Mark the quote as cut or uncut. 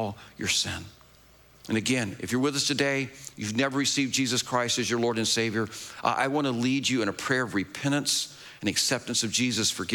uncut